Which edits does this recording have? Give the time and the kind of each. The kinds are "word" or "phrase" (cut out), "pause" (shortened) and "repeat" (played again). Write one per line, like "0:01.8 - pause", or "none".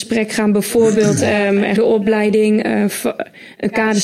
0:01.8 - phrase